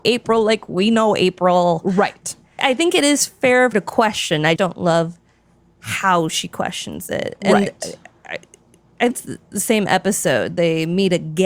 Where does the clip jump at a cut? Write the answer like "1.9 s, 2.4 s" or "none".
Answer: 2.6 s, 3.7 s, 4.6 s, 9.1 s